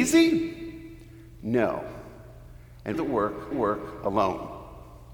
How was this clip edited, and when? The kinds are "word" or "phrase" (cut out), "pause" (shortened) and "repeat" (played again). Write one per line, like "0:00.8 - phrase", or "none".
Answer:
0:02.9 - phrase
0:03.5 - repeat